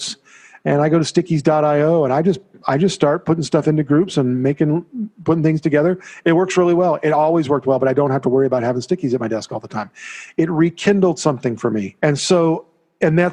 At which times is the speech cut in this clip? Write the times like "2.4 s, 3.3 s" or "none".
12.0 s